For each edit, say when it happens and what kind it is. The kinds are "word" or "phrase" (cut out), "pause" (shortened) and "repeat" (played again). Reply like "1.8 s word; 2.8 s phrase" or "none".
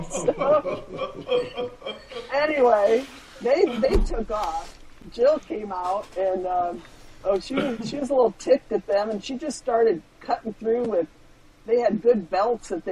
none